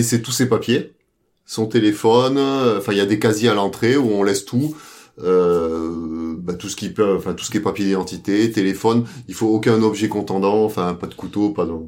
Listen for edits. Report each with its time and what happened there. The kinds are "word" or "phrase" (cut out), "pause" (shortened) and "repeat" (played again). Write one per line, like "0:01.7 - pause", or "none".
none